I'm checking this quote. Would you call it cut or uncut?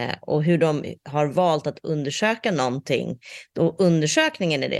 uncut